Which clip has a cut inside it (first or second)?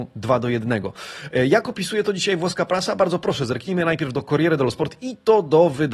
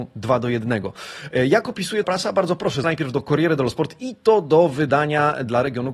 second